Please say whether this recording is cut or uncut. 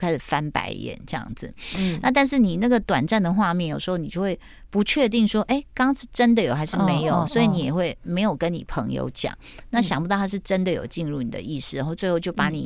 uncut